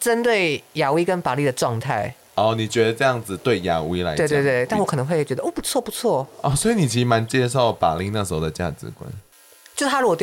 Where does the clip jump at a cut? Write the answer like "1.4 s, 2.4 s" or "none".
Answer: none